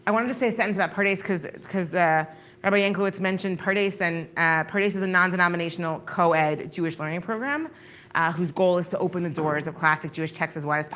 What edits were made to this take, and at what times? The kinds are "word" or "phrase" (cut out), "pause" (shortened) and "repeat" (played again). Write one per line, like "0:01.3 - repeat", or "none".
none